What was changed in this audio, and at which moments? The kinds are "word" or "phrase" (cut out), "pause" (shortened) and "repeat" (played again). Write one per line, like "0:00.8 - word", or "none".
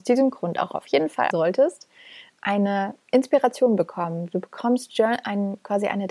0:01.3 - word